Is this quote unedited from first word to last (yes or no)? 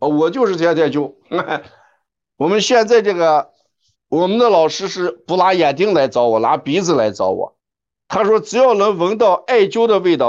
no